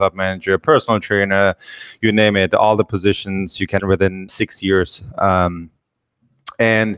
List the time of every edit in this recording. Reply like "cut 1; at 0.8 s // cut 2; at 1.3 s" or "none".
cut 1; at 3.8 s // cut 2; at 4.3 s